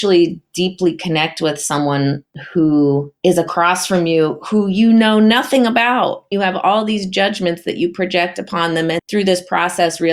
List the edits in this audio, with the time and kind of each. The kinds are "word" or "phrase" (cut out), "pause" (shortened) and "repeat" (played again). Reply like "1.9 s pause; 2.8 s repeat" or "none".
6.3 s word; 9.0 s word